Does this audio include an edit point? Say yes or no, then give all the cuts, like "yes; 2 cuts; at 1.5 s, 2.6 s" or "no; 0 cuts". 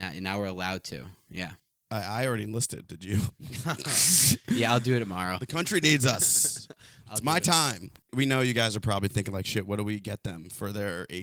no; 0 cuts